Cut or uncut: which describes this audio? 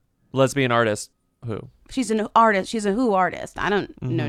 uncut